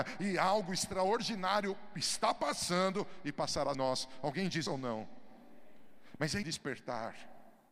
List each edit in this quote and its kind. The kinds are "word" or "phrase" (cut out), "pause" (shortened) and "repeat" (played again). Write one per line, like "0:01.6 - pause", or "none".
0:03.7 - word
0:04.7 - phrase
0:06.4 - word